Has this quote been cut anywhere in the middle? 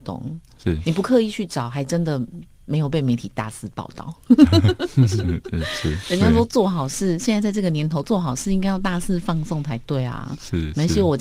no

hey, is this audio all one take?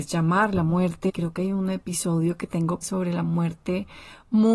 no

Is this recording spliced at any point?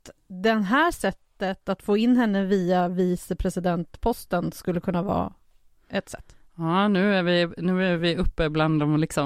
no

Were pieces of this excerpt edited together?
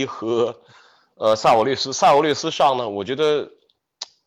no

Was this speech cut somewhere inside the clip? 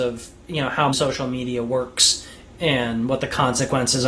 yes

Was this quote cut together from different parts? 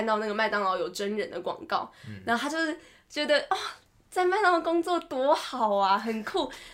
no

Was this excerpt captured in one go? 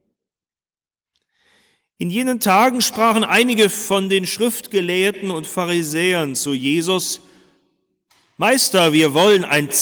yes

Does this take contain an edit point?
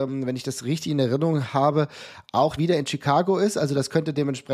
yes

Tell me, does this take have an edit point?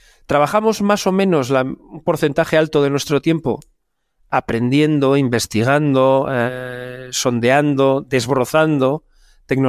no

